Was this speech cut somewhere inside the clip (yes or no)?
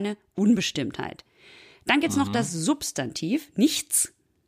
no